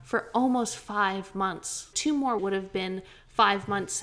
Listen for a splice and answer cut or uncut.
cut